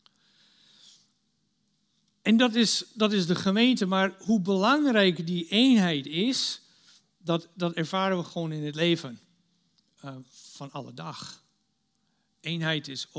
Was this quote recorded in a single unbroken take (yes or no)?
yes